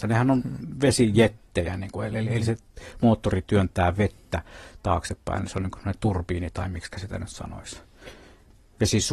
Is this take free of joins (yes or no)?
yes